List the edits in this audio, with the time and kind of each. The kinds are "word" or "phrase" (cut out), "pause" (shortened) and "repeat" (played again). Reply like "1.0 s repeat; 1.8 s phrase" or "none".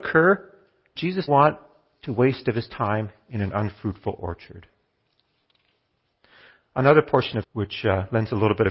1.0 s word; 1.3 s word; 7.4 s word

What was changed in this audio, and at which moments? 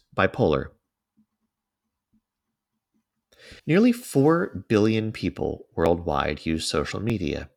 3.6 s pause

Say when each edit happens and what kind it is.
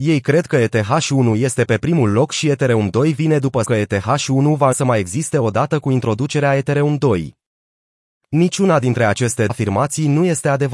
3.6 s word; 4.7 s word; 9.5 s word

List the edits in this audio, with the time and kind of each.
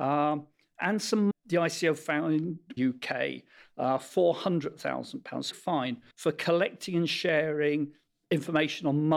1.3 s phrase; 2.8 s word; 5.5 s phrase; 6.1 s pause

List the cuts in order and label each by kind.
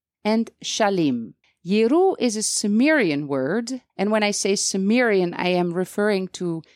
1.4 s pause; 3.9 s pause

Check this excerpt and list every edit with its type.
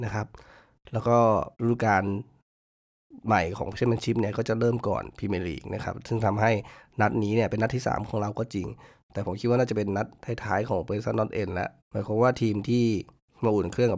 1.5 s pause; 11.8 s pause

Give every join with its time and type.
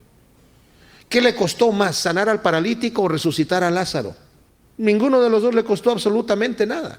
none

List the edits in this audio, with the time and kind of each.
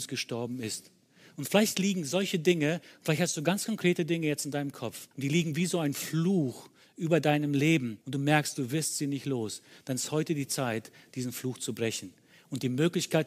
5.1 s pause; 8.0 s pause

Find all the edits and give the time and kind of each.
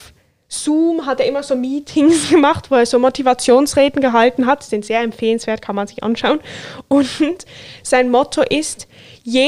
none

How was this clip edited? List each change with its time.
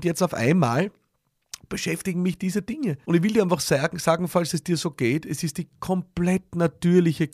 3.0 s pause

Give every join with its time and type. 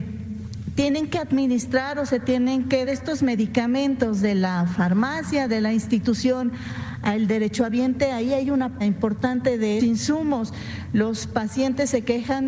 2.9 s word; 8.8 s word; 9.8 s word

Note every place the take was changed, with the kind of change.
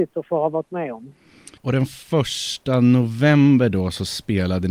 1.6 s pause; 2.0 s pause

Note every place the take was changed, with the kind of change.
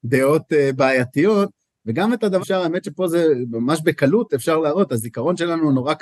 2.4 s word

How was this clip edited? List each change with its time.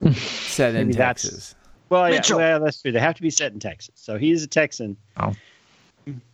1.7 s pause

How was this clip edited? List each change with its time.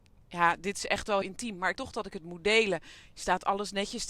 1.2 s word; 1.8 s word

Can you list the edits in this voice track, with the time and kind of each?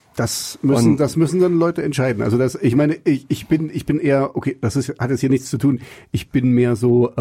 none

